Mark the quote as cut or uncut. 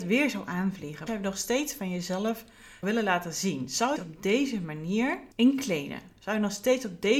cut